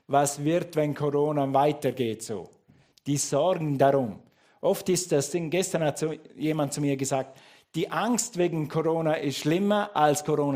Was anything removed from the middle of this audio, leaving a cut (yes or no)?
no